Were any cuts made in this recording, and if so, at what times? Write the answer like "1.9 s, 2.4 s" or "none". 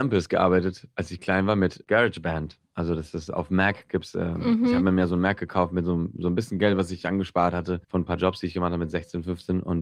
7.8 s